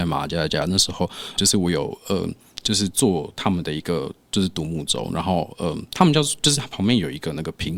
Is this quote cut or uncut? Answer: cut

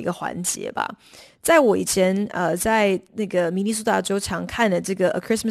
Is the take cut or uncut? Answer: uncut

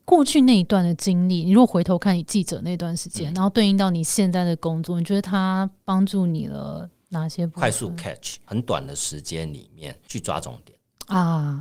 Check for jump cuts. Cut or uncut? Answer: uncut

